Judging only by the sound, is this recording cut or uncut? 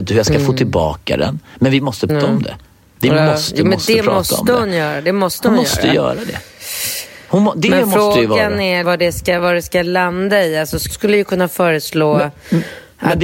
cut